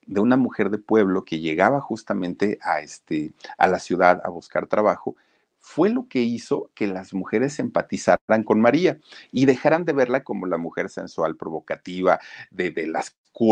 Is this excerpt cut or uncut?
uncut